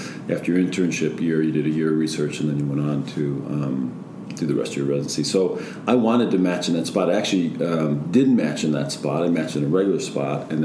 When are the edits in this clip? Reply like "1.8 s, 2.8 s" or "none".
none